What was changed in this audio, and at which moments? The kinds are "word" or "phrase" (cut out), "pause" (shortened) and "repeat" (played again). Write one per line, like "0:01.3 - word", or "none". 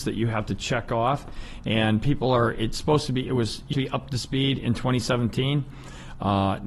0:03.7 - phrase

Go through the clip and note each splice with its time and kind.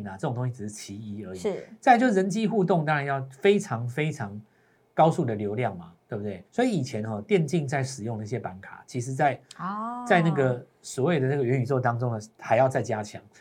0:06.5 - pause

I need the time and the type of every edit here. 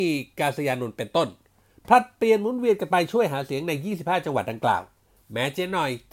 none

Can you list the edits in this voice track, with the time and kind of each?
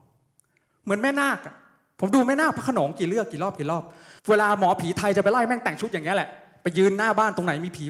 0:04.2 - pause

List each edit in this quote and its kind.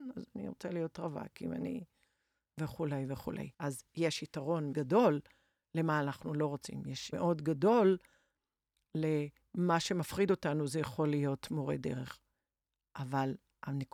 0:03.5 - pause
0:04.7 - word
0:07.1 - word

